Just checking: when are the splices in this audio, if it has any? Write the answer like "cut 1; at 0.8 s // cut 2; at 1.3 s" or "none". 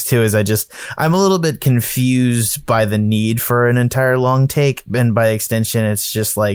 none